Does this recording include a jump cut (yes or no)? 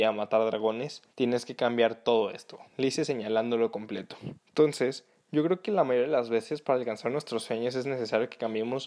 yes